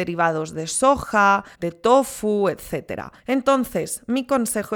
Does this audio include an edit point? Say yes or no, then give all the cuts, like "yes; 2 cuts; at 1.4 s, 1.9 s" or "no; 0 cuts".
yes; 2 cuts; at 1.5 s, 3.2 s